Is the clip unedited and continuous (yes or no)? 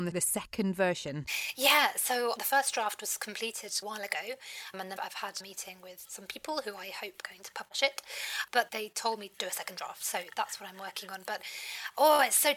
no